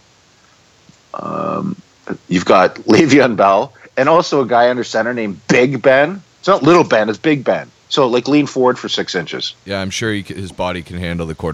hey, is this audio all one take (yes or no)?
no